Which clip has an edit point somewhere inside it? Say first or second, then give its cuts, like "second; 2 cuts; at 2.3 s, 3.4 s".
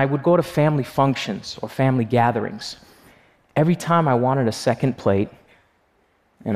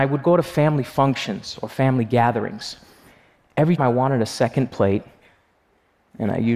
second; 1 cut; at 3.8 s